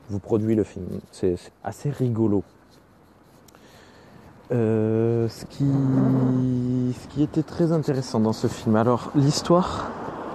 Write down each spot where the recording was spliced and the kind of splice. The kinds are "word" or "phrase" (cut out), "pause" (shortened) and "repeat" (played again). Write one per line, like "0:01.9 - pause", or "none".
0:01.5 - word